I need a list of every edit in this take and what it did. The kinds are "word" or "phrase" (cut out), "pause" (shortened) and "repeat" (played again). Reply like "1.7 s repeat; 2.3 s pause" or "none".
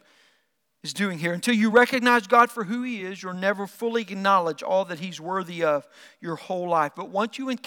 none